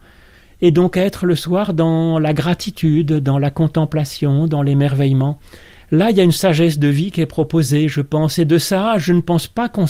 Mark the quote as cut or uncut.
uncut